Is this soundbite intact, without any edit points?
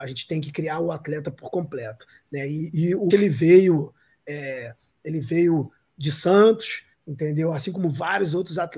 no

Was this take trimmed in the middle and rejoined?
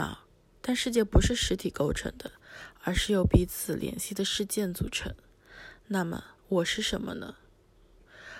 yes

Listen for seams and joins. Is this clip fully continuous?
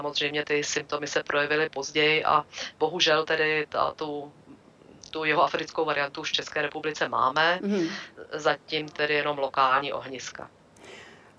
yes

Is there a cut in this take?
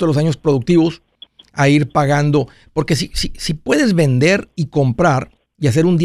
no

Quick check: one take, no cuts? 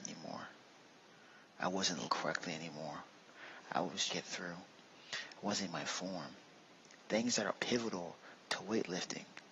no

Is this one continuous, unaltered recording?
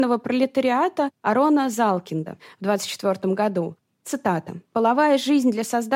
yes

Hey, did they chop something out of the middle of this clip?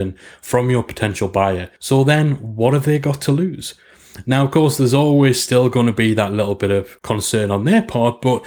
yes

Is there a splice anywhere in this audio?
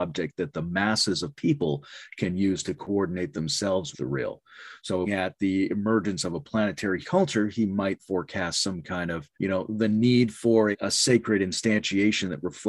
yes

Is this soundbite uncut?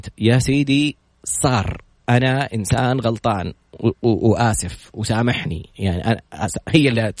yes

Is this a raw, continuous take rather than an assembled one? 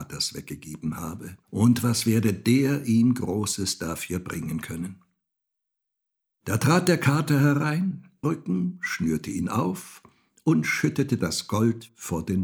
no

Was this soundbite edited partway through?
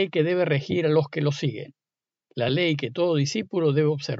no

